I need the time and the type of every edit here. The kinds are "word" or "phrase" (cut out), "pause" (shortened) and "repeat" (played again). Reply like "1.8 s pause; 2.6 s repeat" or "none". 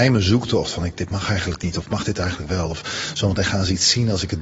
none

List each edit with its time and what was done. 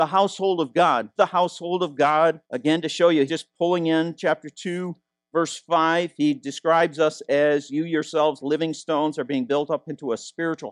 1.2 s word; 2.4 s pause; 3.3 s word; 8.4 s word

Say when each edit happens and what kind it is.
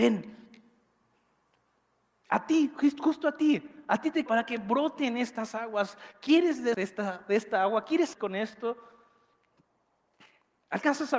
4.3 s word; 6.7 s word; 8.1 s phrase

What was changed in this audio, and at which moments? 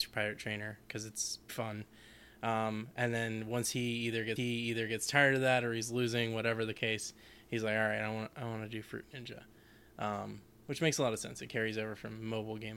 1.5 s word; 4.4 s repeat

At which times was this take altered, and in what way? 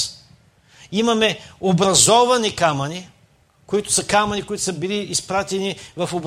none

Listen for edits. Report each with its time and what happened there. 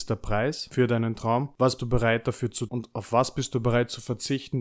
1.8 s word; 2.7 s word

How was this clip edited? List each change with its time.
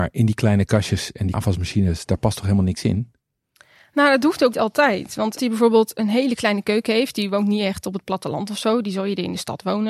1.3 s word; 4.5 s word; 5.4 s word

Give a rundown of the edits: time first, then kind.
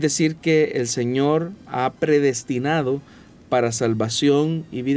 none

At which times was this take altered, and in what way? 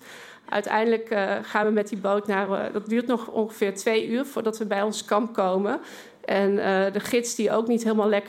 none

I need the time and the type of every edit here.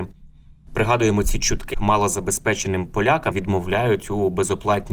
1.7 s word; 3.3 s word

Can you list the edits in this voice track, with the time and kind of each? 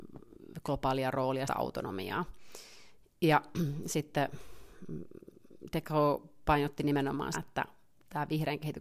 1.5 s word; 7.3 s word

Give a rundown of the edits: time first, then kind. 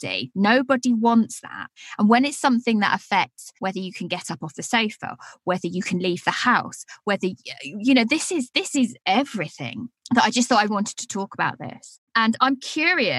3.6 s pause; 10.7 s word

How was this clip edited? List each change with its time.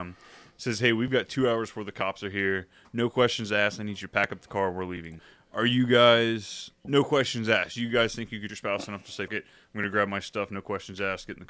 8.5 s word; 9.3 s word

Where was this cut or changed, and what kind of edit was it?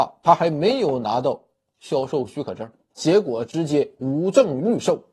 2.9 s word

